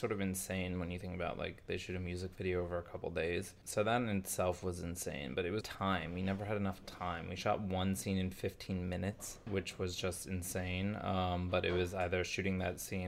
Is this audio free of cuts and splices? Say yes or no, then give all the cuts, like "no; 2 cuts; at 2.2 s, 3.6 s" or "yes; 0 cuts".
no; 1 cut; at 5.6 s